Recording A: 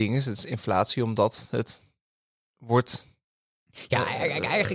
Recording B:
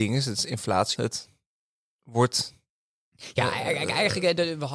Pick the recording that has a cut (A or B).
B